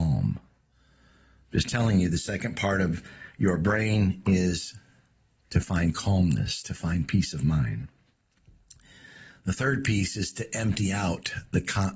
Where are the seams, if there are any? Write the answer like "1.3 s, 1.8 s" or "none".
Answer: none